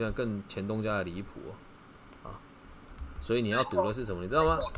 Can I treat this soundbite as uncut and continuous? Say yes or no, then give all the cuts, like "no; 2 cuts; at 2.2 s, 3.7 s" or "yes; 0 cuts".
yes; 0 cuts